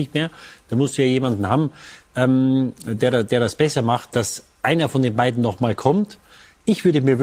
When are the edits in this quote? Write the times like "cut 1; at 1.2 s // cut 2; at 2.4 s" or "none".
none

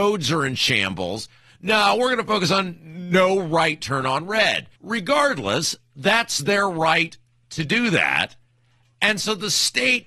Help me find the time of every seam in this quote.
cut 1; at 4.8 s

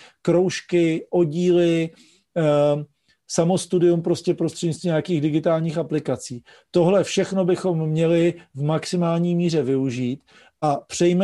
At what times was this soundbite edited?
none

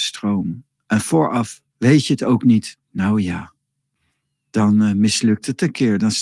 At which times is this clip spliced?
cut 1; at 1.7 s // cut 2; at 2.8 s

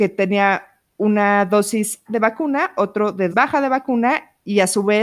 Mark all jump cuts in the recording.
cut 1; at 2.1 s // cut 2; at 3.3 s

